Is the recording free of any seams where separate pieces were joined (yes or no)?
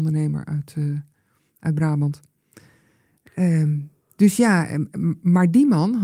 yes